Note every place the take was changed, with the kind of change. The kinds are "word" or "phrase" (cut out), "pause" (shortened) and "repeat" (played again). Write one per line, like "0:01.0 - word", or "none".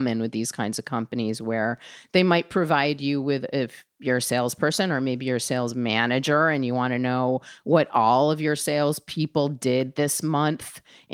none